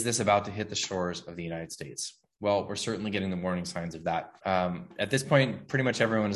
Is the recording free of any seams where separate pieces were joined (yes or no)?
no